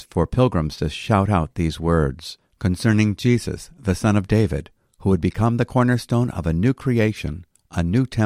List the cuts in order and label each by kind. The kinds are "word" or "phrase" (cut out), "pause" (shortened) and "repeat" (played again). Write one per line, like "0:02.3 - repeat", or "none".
none